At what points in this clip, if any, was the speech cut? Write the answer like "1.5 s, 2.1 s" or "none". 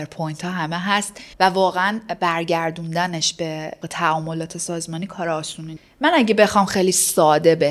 1.3 s